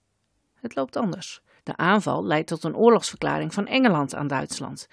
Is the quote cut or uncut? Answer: cut